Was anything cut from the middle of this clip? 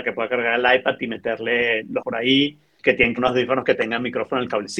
yes; 3 cuts; at 2.0 s, 2.8 s, 3.2 s

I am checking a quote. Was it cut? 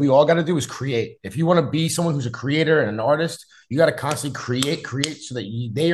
yes; 1 cut; at 4.8 s

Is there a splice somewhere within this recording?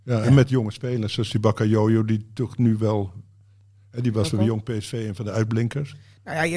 no; 0 cuts

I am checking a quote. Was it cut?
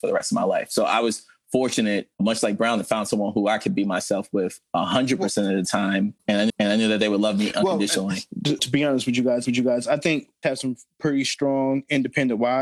yes; 5 cuts; at 2.1 s, 6.5 s, 8.6 s, 9.4 s, 10.4 s

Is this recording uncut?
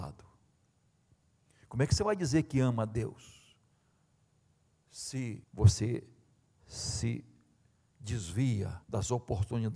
no; 2 cuts; at 5.4 s, 8.8 s

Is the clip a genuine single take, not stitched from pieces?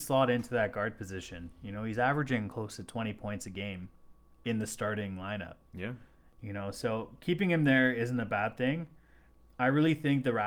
yes; 0 cuts

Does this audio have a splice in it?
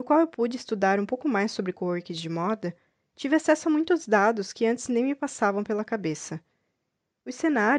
no; 0 cuts

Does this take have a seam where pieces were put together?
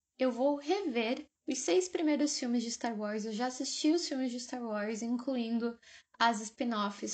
yes; 1 cut; at 1.4 s

